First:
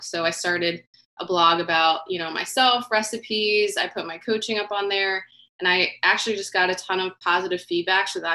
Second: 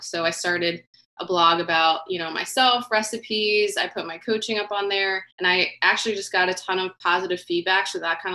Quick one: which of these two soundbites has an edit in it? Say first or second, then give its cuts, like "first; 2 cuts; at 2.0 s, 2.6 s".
second; 1 cut; at 5.3 s